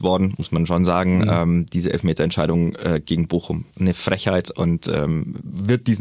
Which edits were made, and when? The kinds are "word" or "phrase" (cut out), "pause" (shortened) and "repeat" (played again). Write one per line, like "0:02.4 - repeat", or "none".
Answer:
none